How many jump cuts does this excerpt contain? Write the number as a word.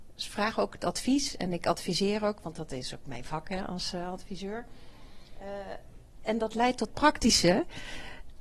one